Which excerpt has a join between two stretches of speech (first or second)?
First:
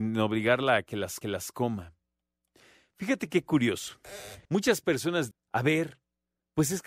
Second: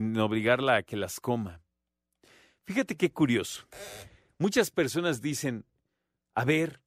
first